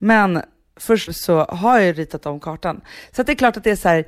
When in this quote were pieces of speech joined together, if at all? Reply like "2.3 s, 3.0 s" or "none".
1.1 s